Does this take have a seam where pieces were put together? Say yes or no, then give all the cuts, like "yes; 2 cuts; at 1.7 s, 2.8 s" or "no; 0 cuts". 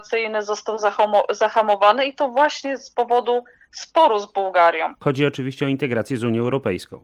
no; 0 cuts